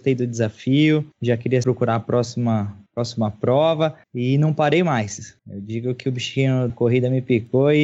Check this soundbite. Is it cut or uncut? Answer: cut